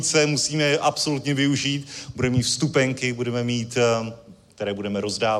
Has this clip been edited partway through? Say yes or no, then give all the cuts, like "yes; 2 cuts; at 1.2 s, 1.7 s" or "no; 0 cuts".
no; 0 cuts